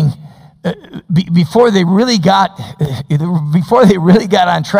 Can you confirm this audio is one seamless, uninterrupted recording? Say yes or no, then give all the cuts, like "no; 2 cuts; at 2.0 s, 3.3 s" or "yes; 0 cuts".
yes; 0 cuts